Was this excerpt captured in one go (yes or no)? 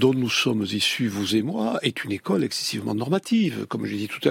yes